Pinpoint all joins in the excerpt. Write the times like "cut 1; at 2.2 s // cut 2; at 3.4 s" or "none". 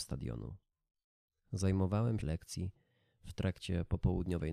cut 1; at 2.2 s